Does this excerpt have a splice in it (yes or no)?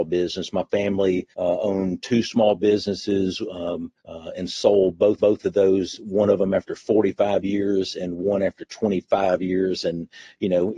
yes